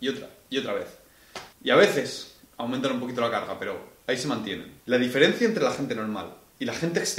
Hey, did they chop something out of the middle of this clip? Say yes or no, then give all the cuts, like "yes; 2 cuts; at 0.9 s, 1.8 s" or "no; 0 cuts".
yes; 3 cuts; at 1.5 s, 2.5 s, 4.8 s